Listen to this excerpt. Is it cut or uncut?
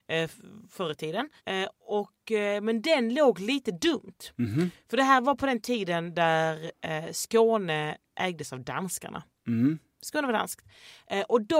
cut